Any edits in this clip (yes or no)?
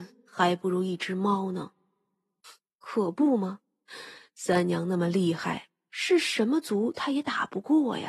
no